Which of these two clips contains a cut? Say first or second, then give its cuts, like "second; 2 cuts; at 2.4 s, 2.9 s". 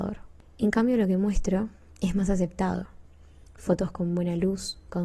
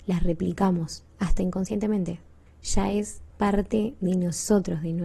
second; 3 cuts; at 1.1 s, 2.5 s, 3.3 s